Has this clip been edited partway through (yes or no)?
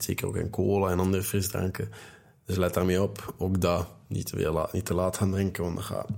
no